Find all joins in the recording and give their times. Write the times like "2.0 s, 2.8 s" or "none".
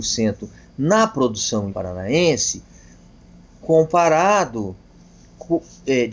1.7 s, 3.6 s